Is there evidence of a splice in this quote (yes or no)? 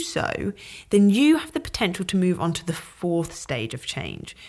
no